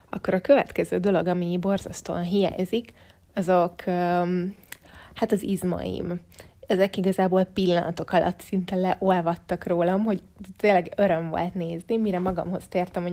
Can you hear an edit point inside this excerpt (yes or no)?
no